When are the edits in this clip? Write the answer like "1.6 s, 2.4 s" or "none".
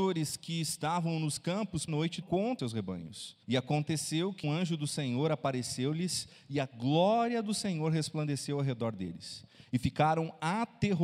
1.9 s, 2.2 s, 2.6 s, 3.4 s, 4.4 s